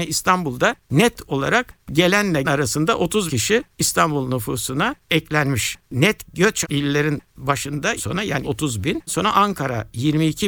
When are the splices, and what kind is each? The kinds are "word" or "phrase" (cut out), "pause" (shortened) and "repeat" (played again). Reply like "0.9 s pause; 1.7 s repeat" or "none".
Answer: 2.4 s word; 3.3 s word; 6.6 s word; 8.0 s word; 8.4 s word; 9.1 s word